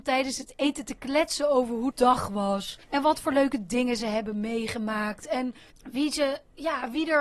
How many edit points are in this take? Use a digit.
3